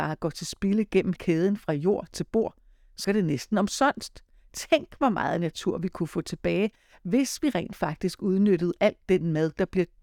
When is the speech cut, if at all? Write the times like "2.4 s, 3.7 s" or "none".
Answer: 1.2 s, 3.0 s